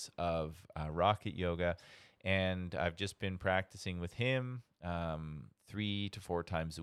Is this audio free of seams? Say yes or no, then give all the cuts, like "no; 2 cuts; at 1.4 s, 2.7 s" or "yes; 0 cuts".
yes; 0 cuts